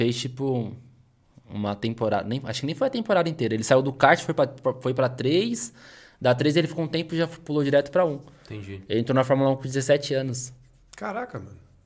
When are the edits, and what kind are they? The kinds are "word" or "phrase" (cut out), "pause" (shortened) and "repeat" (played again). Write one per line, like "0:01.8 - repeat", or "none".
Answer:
none